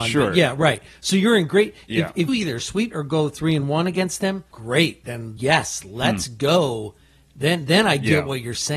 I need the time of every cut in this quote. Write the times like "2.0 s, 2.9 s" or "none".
2.3 s, 2.9 s, 4.5 s, 5.4 s